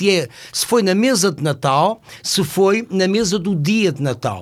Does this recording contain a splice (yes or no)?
no